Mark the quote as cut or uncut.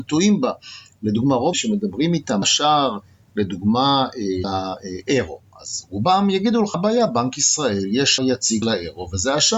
cut